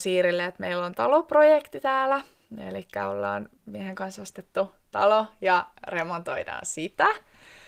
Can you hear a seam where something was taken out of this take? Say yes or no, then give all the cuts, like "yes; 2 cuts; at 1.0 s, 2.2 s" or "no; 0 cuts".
yes; 2 cuts; at 0.9 s, 3.6 s